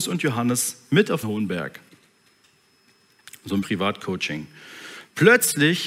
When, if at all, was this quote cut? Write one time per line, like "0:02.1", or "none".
0:01.2
0:03.6